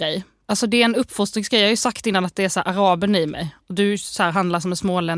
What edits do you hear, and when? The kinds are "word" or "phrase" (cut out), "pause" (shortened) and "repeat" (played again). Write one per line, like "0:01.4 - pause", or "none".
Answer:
none